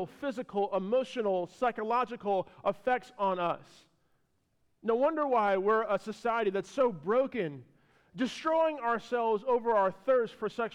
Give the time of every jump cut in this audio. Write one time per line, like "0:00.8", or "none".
none